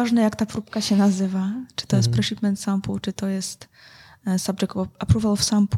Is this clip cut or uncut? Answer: uncut